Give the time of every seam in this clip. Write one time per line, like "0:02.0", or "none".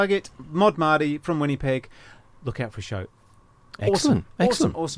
none

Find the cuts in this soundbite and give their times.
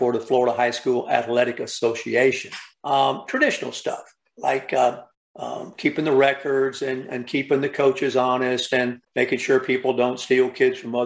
0:02.7
0:05.1
0:09.0

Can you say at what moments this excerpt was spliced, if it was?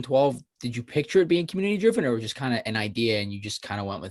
none

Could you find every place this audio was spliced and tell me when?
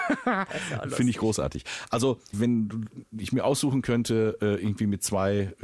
0:02.3

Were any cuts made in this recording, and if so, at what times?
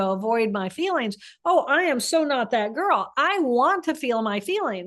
none

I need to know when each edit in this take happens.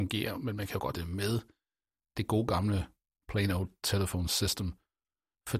0:00.9
0:03.2

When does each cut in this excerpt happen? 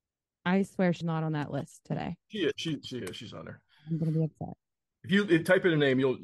0:01.0

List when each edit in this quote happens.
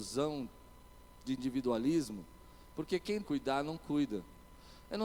0:03.2

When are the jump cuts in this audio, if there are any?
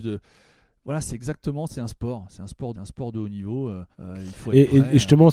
0:02.7
0:03.9

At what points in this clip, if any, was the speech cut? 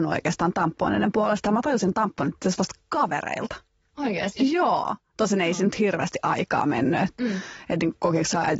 none

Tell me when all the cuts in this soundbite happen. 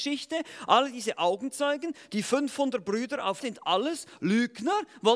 0:03.4

